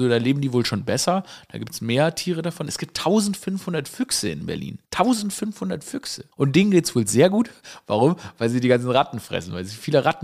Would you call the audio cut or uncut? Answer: cut